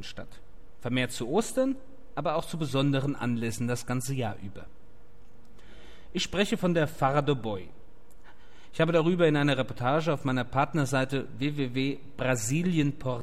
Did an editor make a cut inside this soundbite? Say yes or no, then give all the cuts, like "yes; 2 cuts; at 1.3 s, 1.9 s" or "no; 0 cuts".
no; 0 cuts